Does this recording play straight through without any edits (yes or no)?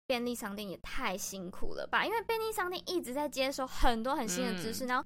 yes